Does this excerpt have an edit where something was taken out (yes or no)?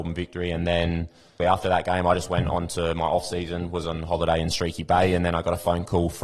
yes